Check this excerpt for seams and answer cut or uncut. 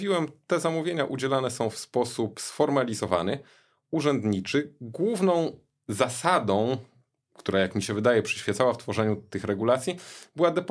uncut